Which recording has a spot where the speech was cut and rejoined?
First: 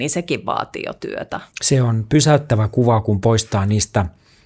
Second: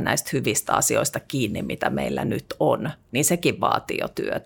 first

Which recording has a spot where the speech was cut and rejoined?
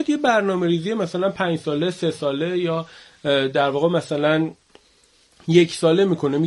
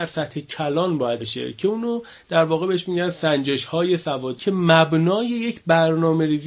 second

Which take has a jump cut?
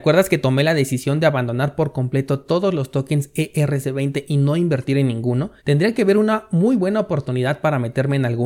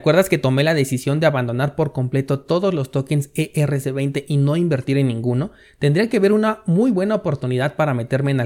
first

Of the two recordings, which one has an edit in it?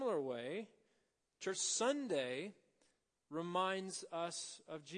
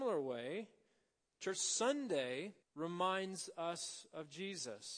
second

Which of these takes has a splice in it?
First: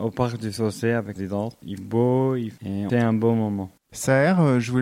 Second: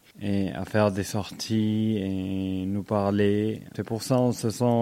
first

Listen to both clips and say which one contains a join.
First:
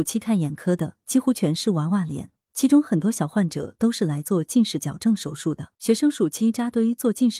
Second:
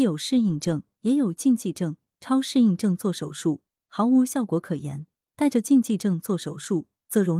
first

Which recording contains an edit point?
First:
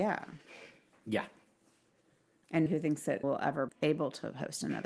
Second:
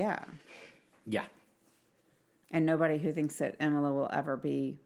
first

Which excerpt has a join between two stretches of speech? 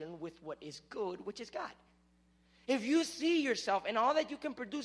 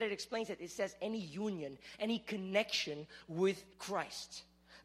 second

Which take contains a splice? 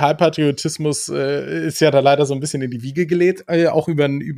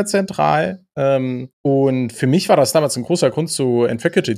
second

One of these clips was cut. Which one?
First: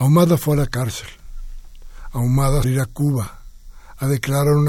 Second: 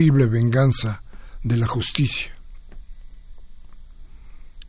first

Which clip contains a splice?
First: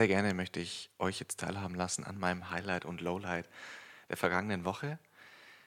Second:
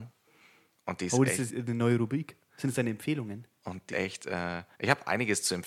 second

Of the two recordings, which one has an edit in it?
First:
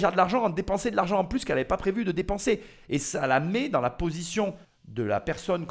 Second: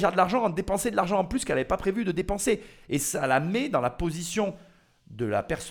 first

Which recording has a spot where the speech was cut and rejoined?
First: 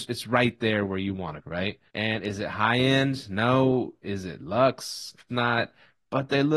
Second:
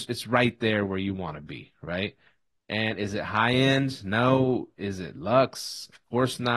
first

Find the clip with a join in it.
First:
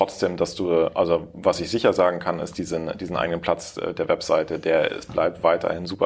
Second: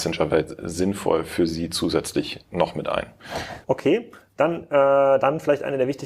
second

